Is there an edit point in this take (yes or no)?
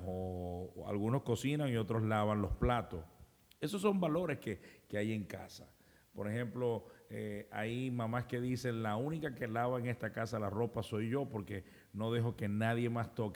no